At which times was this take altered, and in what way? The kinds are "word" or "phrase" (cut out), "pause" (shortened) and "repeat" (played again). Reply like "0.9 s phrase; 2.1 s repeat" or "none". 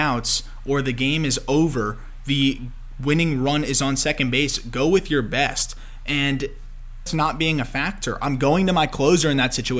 7.1 s phrase